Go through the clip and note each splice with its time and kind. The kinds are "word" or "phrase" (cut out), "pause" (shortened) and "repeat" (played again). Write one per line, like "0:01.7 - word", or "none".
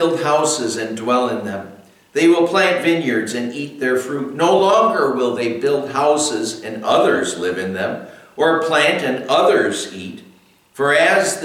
none